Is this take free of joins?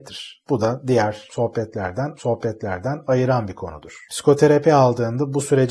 no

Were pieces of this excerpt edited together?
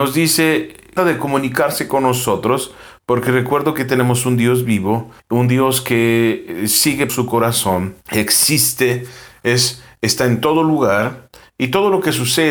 yes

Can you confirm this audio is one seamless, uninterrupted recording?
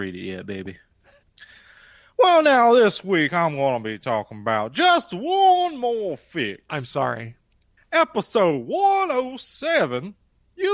yes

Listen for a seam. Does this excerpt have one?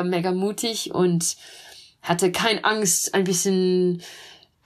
no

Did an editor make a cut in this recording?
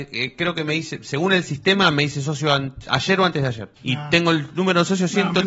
yes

